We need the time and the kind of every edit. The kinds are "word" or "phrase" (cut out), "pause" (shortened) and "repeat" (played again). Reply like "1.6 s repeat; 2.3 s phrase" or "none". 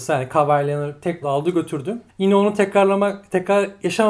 1.2 s phrase; 2.1 s pause